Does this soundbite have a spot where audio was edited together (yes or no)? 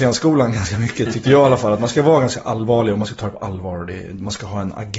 no